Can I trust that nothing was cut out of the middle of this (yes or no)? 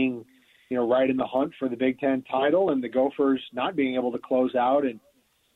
yes